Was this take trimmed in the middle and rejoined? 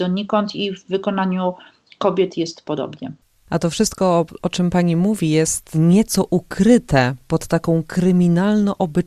no; 0 cuts

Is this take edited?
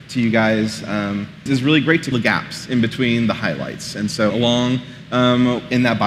yes; 3 cuts; at 1.5 s, 2.1 s, 4.3 s

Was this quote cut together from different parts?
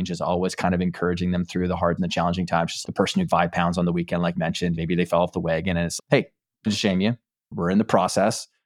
yes; 7 cuts; at 2.0 s, 2.8 s, 3.3 s, 4.4 s, 4.8 s, 6.0 s, 6.7 s

